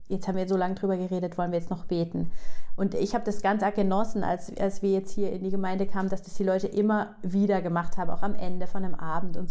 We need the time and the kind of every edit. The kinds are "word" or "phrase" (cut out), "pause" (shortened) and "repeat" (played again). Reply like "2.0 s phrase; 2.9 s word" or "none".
none